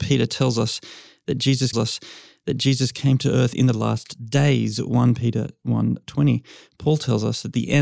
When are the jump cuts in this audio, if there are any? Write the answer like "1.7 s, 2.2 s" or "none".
1.7 s

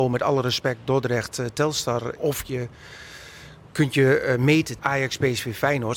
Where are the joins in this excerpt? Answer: 2.2 s, 4.8 s

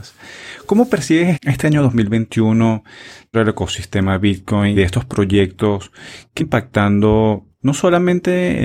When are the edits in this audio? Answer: 1.3 s, 3.3 s, 4.7 s, 6.4 s

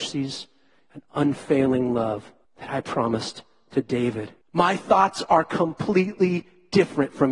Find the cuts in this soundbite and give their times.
2.4 s, 4.4 s

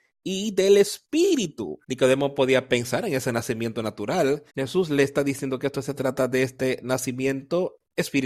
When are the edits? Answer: 1.8 s, 4.5 s

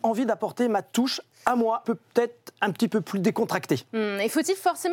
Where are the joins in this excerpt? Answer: 1.8 s

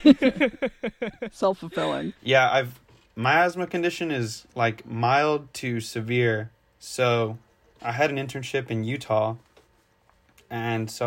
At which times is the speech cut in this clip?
2.2 s

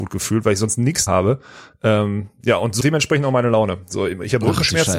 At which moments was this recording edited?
1.1 s, 2.8 s

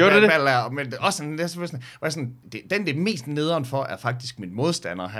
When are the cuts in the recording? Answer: 2.4 s

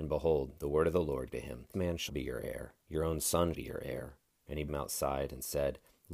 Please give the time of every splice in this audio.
1.3 s, 1.7 s, 2.1 s, 2.8 s, 3.5 s, 4.3 s, 4.7 s

